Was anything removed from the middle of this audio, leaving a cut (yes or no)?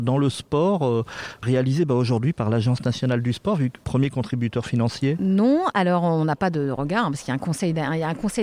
yes